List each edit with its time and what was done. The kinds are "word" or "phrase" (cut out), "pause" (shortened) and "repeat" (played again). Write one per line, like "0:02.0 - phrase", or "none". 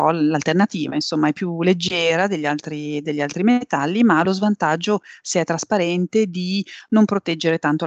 none